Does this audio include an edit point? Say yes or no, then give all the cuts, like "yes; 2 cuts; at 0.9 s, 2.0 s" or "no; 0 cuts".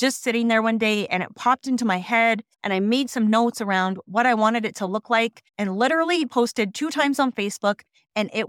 yes; 2 cuts; at 2.5 s, 5.5 s